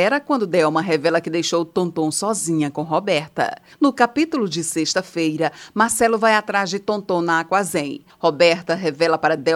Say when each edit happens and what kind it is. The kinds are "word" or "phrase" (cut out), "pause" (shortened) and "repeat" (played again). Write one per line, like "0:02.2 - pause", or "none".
none

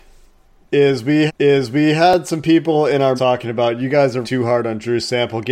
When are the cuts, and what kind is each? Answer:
0:01.3 - repeat
0:03.2 - word
0:04.2 - word

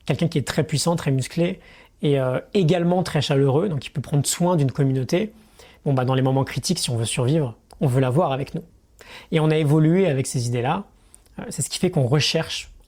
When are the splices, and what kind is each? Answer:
none

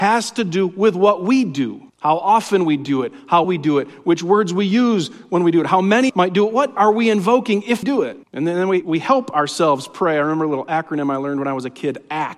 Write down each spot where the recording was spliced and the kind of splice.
0:01.9 - pause
0:03.4 - word
0:06.1 - phrase
0:06.8 - word
0:07.8 - word
0:08.2 - pause
0:08.8 - word

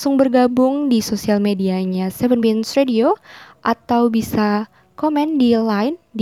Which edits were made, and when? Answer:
none

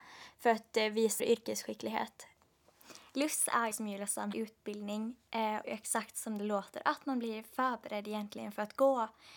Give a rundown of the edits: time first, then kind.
0:01.2 - word
0:03.7 - word
0:04.3 - word
0:05.6 - phrase

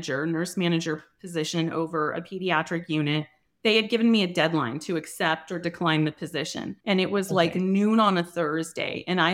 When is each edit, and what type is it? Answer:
0:03.5 - pause
0:06.8 - pause

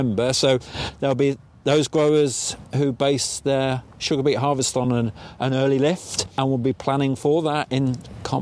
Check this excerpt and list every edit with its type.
none

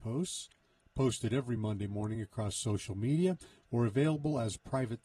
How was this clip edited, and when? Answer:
none

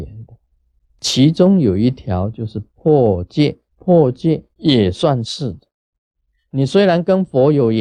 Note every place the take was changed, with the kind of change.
0:03.7 - pause
0:04.5 - pause

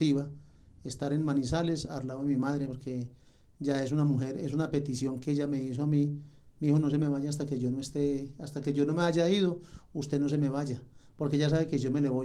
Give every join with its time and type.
none

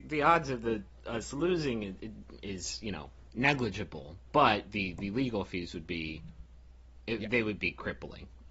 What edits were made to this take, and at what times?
none

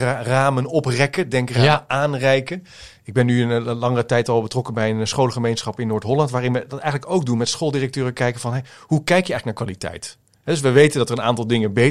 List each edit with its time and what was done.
none

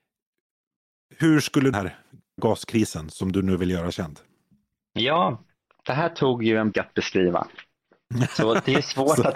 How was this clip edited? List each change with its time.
0:01.7 - phrase
0:02.4 - word
0:06.7 - word

